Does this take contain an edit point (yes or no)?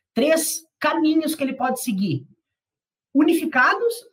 no